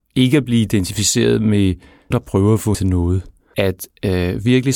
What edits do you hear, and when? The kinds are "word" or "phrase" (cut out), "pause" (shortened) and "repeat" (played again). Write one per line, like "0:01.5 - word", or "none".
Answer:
0:02.1 - word
0:02.7 - word
0:03.5 - word